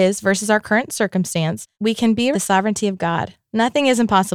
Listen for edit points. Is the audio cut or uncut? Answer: cut